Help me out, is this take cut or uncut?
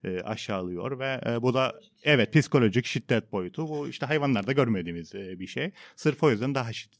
uncut